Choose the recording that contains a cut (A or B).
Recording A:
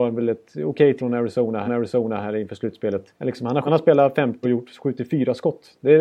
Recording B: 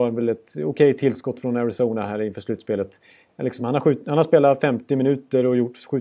A